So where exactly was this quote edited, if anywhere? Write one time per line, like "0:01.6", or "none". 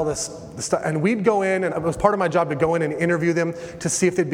0:01.7